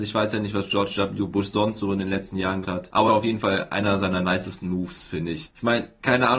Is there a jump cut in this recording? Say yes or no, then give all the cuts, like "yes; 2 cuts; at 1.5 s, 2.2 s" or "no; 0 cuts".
yes; 2 cuts; at 2.6 s, 3.1 s